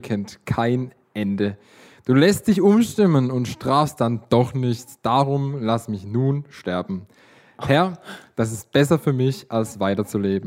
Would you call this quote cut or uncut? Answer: uncut